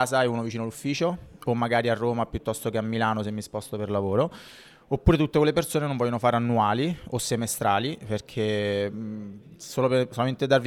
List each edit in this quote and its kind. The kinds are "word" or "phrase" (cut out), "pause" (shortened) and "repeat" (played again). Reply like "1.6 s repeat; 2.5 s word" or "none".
none